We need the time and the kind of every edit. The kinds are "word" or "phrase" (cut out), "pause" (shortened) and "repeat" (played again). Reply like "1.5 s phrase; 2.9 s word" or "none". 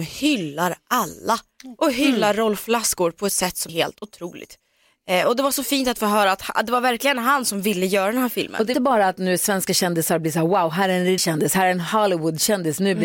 3.7 s word; 8.7 s word; 11.2 s word